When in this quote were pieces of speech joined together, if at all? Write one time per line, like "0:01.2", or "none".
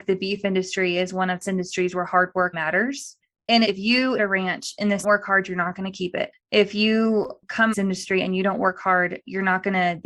0:01.4
0:02.5
0:03.6
0:04.2
0:05.0
0:07.7